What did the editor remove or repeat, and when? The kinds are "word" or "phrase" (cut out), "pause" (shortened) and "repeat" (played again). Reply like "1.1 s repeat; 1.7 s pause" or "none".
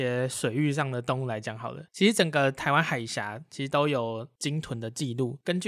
1.9 s pause